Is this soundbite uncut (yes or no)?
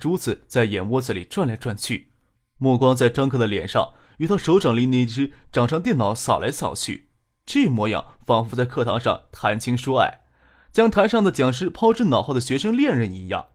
yes